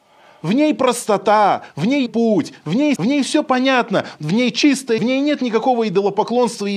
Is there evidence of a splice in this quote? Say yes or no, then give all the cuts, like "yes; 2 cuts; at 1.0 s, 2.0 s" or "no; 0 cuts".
yes; 3 cuts; at 2.1 s, 3.0 s, 5.0 s